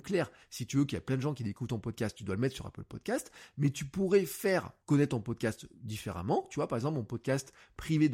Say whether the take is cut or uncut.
cut